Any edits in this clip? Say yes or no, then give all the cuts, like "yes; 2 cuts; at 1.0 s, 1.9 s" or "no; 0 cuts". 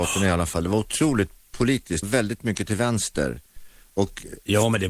yes; 1 cut; at 2.0 s